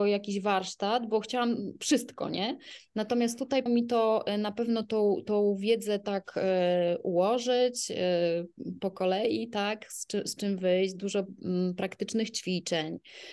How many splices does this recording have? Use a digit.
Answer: 1